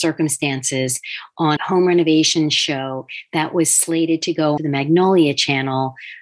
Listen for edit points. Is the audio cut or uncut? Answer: cut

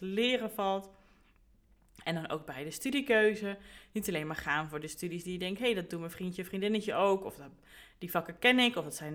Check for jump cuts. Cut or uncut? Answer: uncut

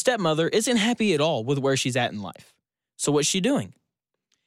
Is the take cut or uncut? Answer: uncut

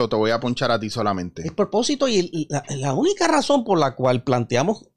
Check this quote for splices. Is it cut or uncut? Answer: uncut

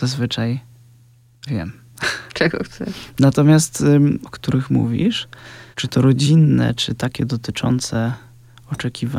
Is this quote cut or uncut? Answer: cut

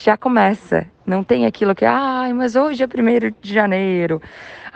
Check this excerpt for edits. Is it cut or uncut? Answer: uncut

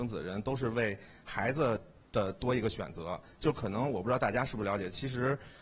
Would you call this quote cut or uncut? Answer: uncut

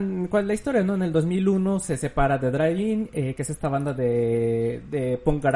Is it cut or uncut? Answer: uncut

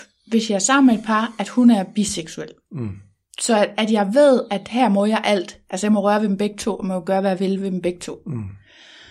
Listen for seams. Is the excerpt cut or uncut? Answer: uncut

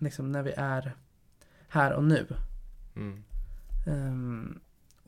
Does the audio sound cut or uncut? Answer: uncut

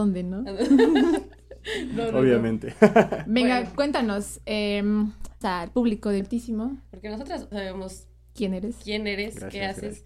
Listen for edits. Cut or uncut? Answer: cut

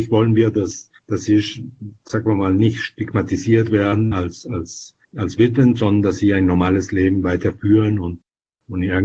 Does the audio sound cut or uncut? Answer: cut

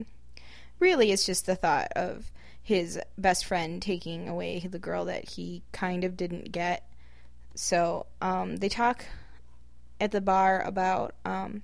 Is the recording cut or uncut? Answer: uncut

